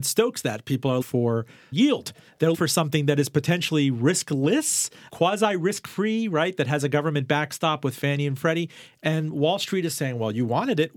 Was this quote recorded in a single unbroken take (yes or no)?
no